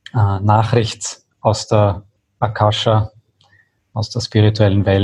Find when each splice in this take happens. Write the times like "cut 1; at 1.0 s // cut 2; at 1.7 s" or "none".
none